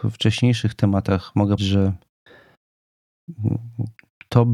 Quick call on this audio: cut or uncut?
cut